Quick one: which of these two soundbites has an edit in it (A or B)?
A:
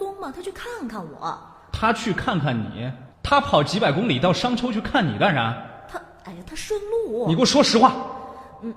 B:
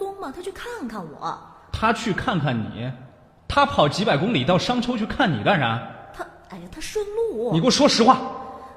A